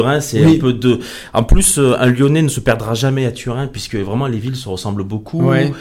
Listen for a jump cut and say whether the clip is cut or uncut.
uncut